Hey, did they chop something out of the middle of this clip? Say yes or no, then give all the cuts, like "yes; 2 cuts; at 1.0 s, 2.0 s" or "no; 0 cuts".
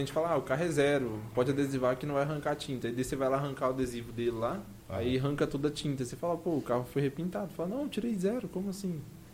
yes; 1 cut; at 4.8 s